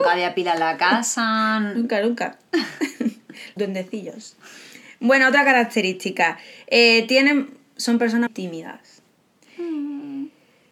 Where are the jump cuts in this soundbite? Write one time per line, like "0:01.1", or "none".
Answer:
0:03.6
0:08.3